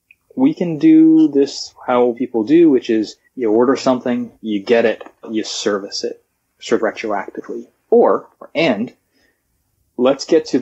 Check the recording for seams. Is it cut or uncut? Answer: cut